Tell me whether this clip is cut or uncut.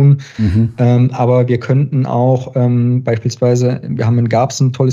uncut